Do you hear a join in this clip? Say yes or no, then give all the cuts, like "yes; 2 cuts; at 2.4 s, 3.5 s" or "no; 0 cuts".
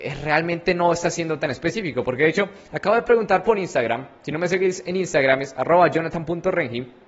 no; 0 cuts